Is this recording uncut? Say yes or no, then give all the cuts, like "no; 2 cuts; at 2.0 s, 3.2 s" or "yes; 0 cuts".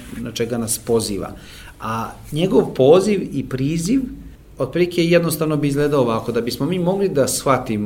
yes; 0 cuts